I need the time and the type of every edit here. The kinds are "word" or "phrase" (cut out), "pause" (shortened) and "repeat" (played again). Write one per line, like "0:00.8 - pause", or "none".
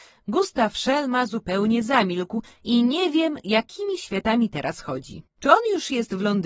0:05.3 - pause